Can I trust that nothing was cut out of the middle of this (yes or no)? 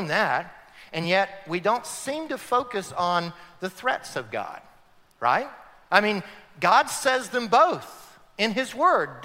yes